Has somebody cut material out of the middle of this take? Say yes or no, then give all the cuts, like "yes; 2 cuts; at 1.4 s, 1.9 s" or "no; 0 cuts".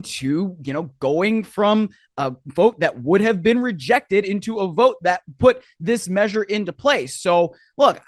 no; 0 cuts